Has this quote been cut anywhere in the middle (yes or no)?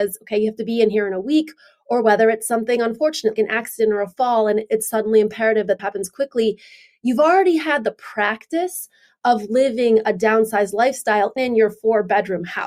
yes